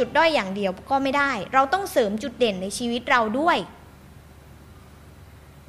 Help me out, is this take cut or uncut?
uncut